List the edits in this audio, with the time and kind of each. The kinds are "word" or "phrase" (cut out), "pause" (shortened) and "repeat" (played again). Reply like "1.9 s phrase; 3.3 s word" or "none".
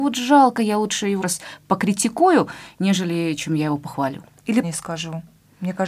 1.2 s word; 4.6 s phrase